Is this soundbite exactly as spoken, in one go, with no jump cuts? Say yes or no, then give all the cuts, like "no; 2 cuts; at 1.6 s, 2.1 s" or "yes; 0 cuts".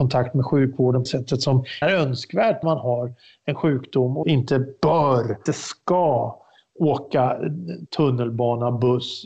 no; 6 cuts; at 1.1 s, 1.8 s, 2.6 s, 4.2 s, 5.5 s, 7.9 s